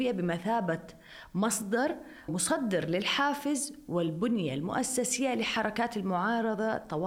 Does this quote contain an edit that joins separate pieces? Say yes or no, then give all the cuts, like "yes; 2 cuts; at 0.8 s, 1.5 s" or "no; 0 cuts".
yes; 1 cut; at 2.3 s